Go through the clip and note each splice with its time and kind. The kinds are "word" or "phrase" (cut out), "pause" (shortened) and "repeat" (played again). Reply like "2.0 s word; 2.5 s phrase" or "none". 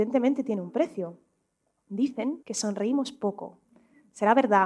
2.4 s pause